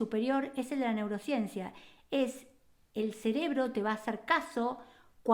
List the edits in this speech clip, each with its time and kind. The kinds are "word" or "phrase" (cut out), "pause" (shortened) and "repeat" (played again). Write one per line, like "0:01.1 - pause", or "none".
none